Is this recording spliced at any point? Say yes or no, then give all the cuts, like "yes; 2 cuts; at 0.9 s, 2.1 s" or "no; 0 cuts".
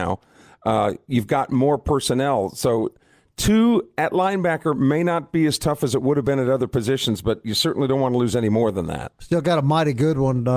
no; 0 cuts